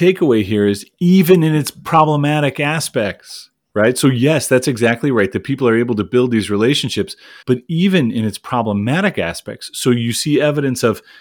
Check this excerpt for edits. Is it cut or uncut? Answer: cut